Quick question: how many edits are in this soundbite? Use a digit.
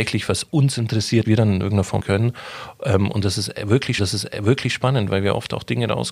3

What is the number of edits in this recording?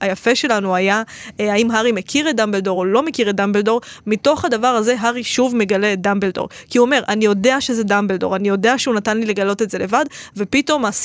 0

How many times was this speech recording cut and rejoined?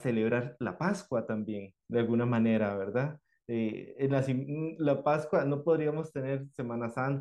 1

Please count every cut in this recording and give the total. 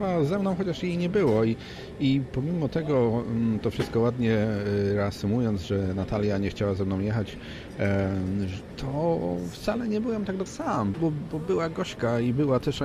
3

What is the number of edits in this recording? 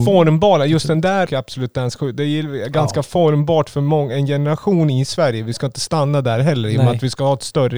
1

